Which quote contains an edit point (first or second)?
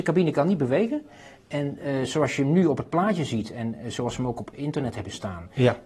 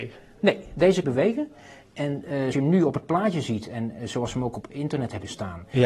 second